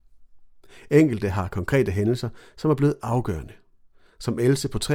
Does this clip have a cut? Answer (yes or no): no